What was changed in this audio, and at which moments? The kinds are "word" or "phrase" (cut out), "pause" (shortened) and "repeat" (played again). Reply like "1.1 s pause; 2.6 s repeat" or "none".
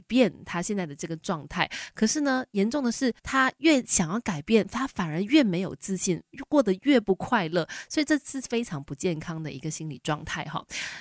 3.2 s pause

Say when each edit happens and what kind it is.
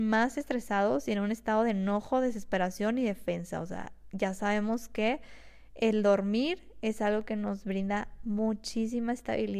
none

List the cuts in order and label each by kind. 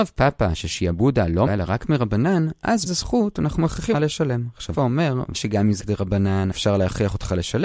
1.5 s word; 2.9 s word; 3.9 s word; 4.7 s word; 5.3 s word; 5.8 s word; 6.5 s word

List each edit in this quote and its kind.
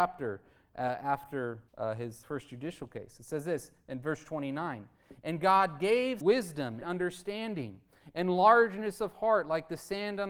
1.7 s pause; 2.2 s word; 6.2 s word; 6.8 s phrase

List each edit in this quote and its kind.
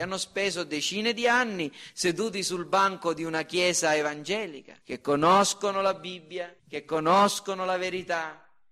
4.8 s pause; 6.6 s pause

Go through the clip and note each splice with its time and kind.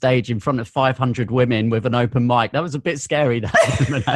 none

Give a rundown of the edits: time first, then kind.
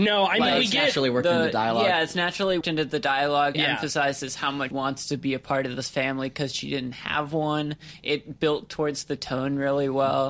2.6 s word; 3.5 s word; 4.7 s word

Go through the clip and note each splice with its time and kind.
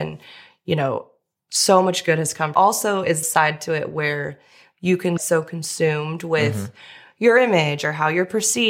2.5 s phrase; 3.2 s word; 5.2 s word

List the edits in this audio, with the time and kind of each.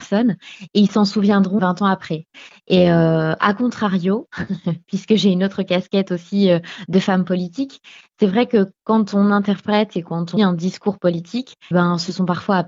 1.6 s word; 10.4 s word; 11.7 s word

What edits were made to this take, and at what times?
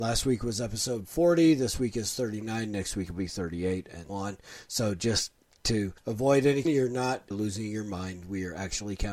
4.1 s word; 6.0 s pause; 6.6 s word; 7.3 s word

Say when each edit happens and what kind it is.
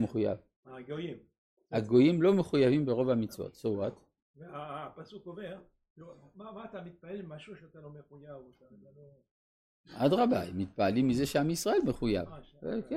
none

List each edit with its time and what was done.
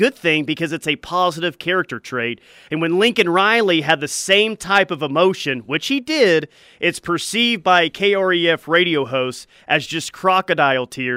none

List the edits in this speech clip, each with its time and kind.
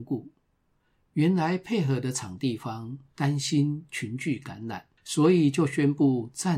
5.0 s pause

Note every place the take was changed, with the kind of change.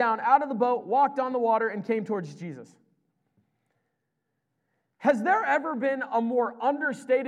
none

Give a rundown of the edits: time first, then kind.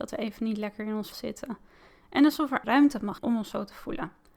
1.1 s word; 2.6 s phrase; 3.2 s word

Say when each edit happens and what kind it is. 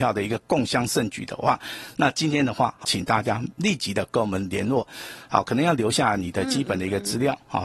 2.8 s word

